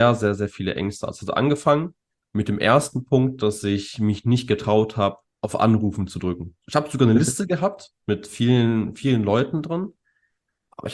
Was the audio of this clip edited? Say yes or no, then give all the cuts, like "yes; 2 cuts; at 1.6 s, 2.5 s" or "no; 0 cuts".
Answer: yes; 3 cuts; at 2.1 s, 5.2 s, 8.0 s